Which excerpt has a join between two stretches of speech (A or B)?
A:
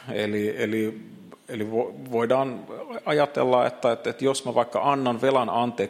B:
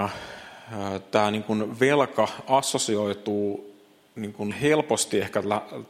B